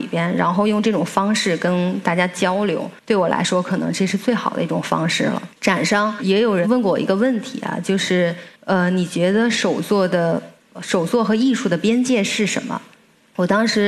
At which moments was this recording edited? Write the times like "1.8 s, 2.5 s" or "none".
3.0 s, 5.5 s, 8.6 s